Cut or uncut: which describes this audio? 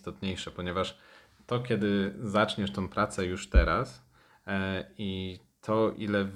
uncut